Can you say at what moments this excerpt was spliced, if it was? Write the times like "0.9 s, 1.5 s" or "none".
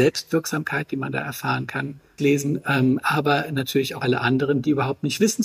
2.2 s, 4.0 s